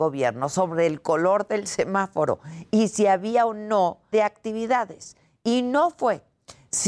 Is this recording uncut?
no; 1 cut; at 4.1 s

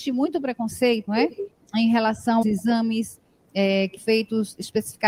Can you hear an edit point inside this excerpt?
yes; 3 cuts; at 1.1 s, 2.4 s, 4.0 s

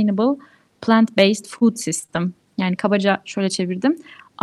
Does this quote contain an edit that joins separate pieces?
no; 0 cuts

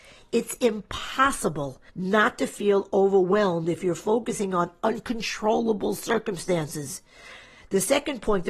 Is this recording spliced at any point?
yes; 1 cut; at 1.9 s

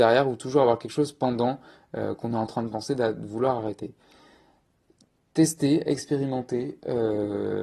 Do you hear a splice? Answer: no; 0 cuts

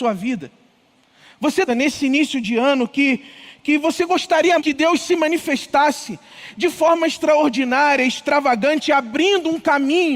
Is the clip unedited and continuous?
no; 2 cuts; at 1.7 s, 4.6 s

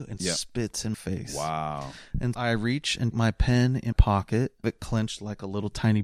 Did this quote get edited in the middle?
yes; 5 cuts; at 0.9 s, 2.3 s, 3.1 s, 3.9 s, 4.6 s

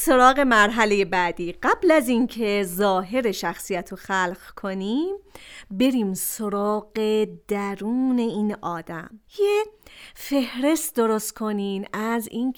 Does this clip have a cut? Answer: yes; 1 cut; at 9.3 s

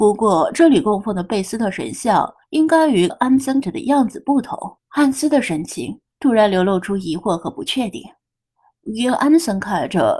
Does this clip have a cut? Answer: yes; 4 cuts; at 2.4 s, 3.1 s, 3.6 s, 4.8 s

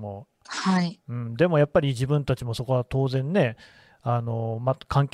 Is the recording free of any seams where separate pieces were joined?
yes; 0 cuts

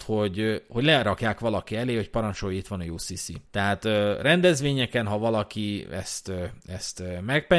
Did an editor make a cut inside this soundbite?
yes; 1 cut; at 3.4 s

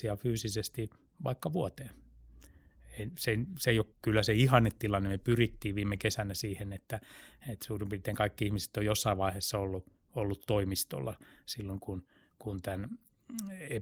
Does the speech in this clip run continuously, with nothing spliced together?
no; 1 cut; at 3.9 s

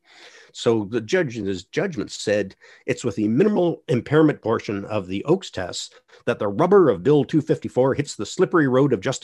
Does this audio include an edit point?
no; 0 cuts

